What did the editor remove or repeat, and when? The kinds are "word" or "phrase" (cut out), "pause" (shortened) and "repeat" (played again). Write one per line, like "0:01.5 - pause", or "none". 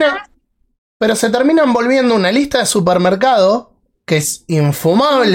none